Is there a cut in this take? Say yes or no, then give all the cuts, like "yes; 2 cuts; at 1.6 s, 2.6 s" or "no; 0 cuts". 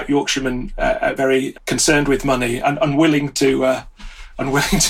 yes; 3 cuts; at 1.2 s, 1.5 s, 2.6 s